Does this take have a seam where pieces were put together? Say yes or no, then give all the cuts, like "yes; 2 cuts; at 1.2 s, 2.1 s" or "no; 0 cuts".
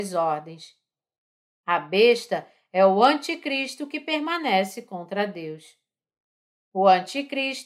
no; 0 cuts